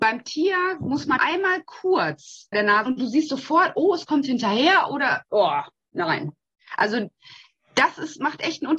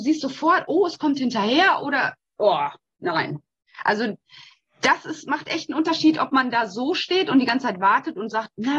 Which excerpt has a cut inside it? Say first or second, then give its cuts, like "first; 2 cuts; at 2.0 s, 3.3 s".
first; 4 cuts; at 1.2 s, 2.5 s, 2.9 s, 5.2 s